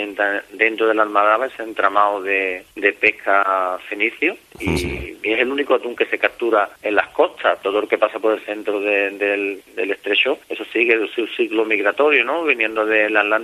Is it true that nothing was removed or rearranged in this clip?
no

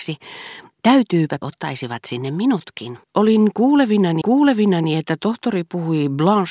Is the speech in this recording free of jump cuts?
no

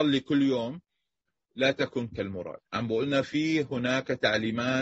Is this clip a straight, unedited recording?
yes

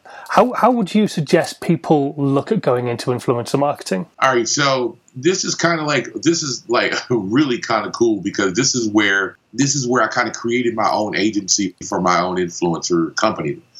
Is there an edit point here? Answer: no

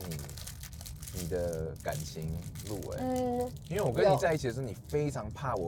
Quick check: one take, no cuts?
yes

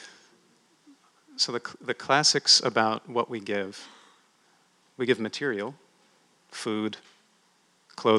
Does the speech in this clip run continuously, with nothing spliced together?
yes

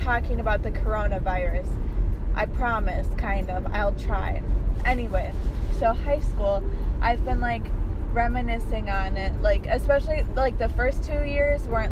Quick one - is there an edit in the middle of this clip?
no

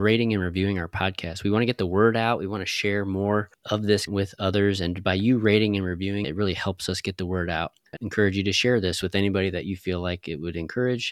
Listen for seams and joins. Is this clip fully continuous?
no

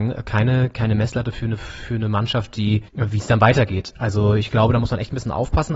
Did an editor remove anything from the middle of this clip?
yes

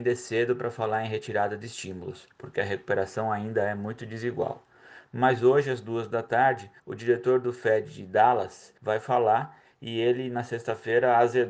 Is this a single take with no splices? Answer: no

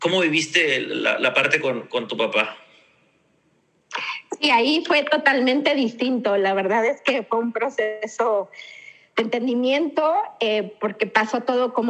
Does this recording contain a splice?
no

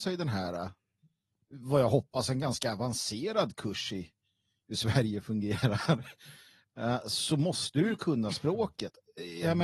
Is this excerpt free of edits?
yes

